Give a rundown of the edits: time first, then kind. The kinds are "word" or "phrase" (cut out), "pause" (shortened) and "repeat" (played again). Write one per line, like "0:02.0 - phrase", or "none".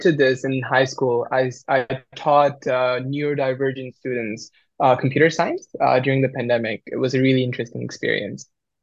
none